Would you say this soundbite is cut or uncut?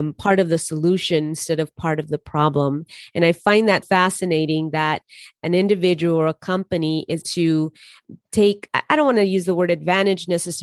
cut